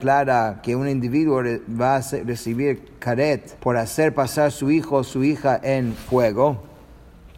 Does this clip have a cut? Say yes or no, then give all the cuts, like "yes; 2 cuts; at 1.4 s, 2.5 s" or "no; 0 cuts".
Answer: yes; 1 cut; at 3.6 s